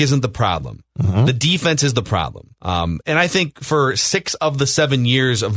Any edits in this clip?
yes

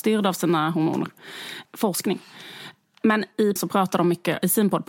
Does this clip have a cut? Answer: yes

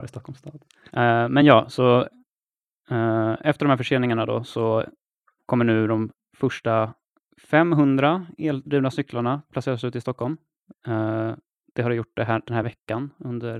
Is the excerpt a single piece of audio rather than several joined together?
yes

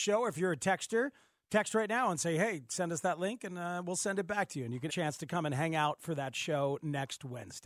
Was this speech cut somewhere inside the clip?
yes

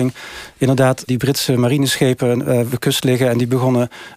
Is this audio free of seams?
no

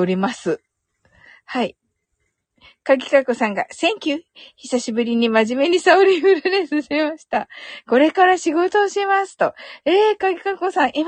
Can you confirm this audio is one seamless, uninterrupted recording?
yes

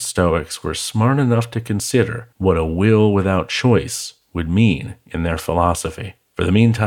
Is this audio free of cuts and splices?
yes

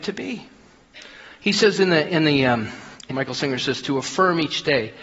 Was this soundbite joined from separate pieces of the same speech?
yes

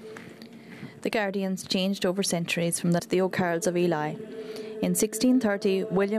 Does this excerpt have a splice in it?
yes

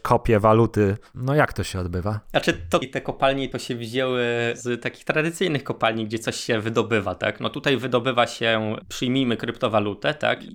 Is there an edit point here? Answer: yes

